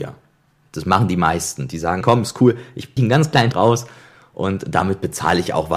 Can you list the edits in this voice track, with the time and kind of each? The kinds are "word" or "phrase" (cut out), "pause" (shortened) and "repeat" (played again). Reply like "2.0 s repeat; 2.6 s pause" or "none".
2.0 s word; 3.0 s word; 3.5 s word